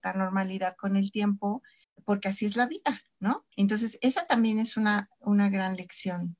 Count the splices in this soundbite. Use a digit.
2